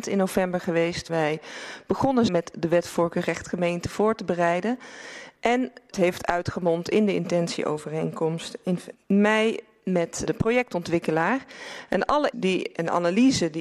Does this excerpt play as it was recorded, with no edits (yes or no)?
no